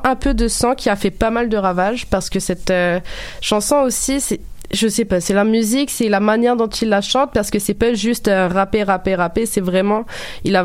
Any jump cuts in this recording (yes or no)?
no